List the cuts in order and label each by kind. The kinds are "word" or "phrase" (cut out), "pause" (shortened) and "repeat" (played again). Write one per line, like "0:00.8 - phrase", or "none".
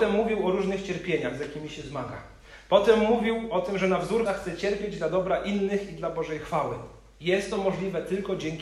0:04.3 - word